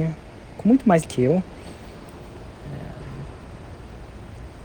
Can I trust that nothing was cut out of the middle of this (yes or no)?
no